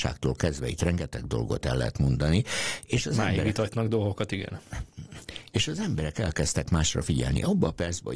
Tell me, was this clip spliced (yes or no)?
no